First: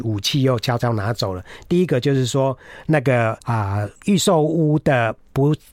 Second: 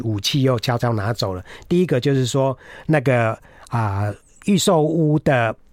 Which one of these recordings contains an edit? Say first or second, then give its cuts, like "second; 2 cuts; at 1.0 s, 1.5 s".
first; 2 cuts; at 3.4 s, 4.0 s